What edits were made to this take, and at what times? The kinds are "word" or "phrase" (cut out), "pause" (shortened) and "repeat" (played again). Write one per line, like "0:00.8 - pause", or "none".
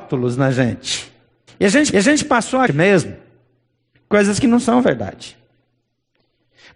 0:01.5 - pause
0:01.9 - repeat
0:02.7 - phrase